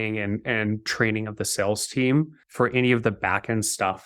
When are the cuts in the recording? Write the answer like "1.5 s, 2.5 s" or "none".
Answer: 2.4 s